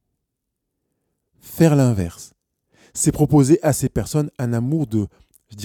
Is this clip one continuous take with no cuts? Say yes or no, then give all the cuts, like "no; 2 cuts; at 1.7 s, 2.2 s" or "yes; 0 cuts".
yes; 0 cuts